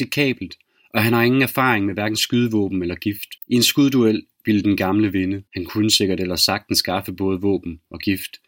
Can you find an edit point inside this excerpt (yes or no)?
yes